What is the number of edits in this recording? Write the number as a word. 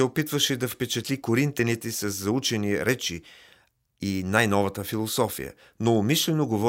zero